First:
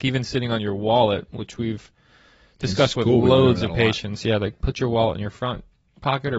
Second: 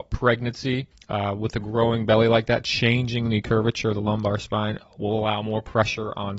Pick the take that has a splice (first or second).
second